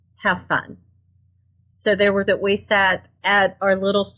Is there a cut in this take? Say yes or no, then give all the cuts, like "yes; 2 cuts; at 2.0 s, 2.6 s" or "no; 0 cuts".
yes; 2 cuts; at 2.3 s, 3.2 s